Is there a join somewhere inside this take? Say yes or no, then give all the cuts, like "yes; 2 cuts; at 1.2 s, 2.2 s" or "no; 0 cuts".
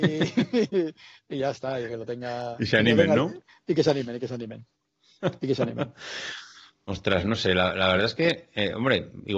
no; 0 cuts